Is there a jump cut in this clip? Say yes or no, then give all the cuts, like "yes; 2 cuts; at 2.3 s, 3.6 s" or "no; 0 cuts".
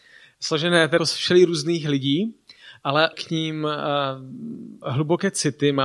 yes; 3 cuts; at 1.0 s, 3.1 s, 4.8 s